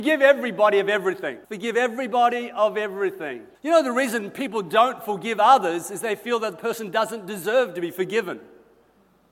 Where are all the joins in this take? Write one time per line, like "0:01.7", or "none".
0:01.4
0:03.5